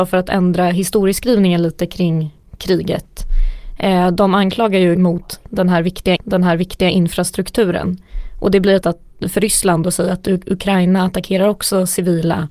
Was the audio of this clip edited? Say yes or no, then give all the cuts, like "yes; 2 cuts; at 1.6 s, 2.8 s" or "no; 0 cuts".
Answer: yes; 3 cuts; at 4.9 s, 6.2 s, 8.8 s